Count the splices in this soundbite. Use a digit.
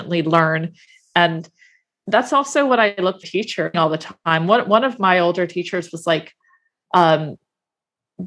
2